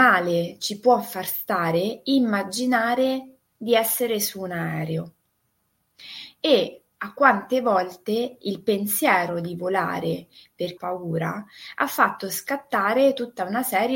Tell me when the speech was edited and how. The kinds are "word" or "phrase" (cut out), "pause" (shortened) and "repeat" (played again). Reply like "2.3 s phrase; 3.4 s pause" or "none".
10.8 s phrase